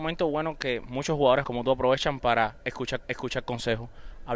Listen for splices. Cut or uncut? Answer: cut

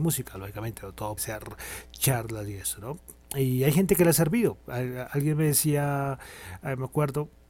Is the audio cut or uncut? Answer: cut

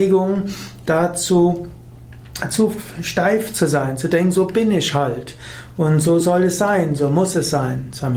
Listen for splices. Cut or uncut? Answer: uncut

